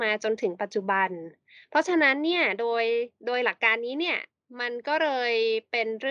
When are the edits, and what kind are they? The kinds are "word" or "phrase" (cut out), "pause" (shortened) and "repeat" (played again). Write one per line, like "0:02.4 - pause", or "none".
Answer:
0:03.2 - pause
0:04.3 - pause